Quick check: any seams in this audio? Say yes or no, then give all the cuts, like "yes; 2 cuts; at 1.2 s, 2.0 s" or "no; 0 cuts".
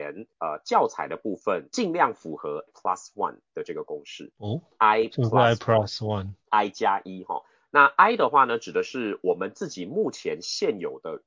yes; 1 cut; at 2.7 s